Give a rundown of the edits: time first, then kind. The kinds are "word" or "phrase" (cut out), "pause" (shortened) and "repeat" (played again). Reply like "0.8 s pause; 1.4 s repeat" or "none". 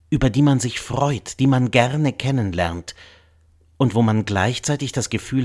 none